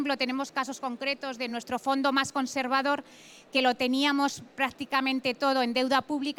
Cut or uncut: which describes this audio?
uncut